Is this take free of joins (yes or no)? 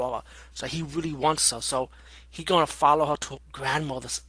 yes